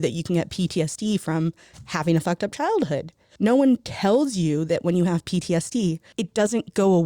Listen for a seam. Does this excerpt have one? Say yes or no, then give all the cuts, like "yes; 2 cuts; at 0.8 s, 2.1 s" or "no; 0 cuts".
no; 0 cuts